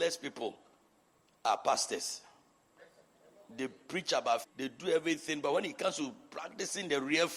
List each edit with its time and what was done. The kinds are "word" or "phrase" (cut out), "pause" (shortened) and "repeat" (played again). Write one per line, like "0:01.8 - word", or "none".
0:04.4 - word